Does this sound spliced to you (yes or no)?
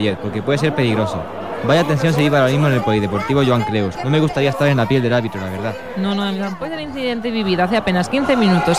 no